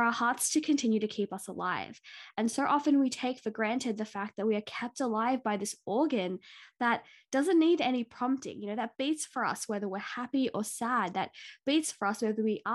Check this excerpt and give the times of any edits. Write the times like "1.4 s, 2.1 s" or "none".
none